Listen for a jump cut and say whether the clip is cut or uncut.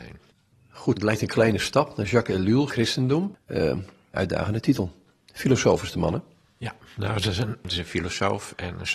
cut